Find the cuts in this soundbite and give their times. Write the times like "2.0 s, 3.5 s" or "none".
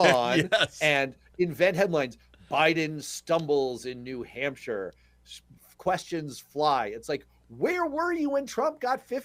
none

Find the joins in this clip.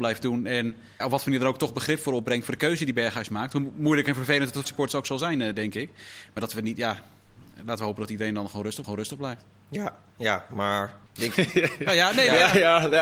1.0 s, 4.6 s, 8.8 s, 11.1 s

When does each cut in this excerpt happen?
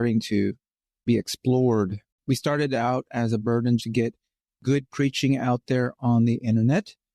3.8 s

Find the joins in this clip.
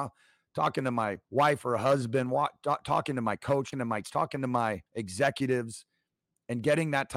1.2 s, 3.7 s, 4.0 s, 4.9 s

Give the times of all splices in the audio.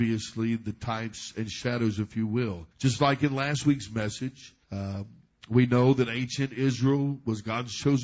2.7 s, 4.6 s

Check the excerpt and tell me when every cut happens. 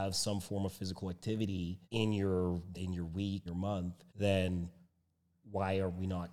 1.8 s, 2.7 s, 3.5 s, 4.1 s

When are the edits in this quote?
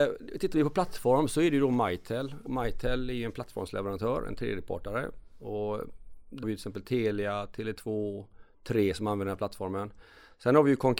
2.5 s, 6.4 s

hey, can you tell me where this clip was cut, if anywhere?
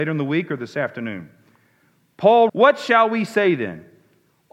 2.5 s

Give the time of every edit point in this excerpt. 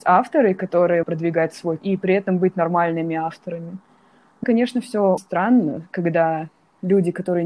1.0 s, 1.8 s, 4.4 s, 5.2 s

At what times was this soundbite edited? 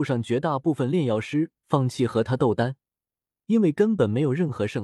none

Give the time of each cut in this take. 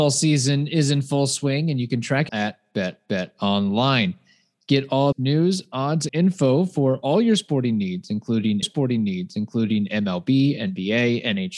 2.3 s, 3.0 s, 5.1 s, 6.1 s, 8.6 s

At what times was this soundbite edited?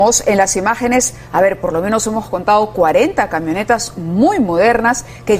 none

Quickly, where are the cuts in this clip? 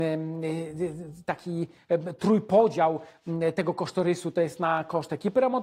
none

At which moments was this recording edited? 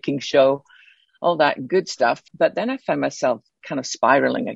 2.3 s

